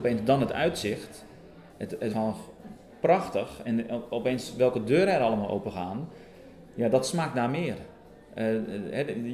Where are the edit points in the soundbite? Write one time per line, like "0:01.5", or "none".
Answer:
0:01.7
0:02.1
0:03.6